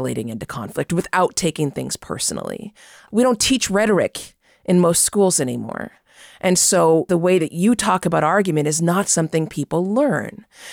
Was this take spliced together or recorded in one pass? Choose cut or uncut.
uncut